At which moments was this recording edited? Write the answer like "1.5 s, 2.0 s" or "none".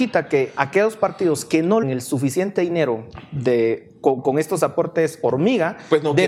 1.8 s